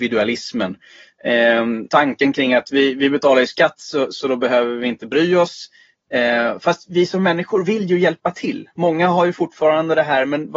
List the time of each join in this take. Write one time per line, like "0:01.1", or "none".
0:01.9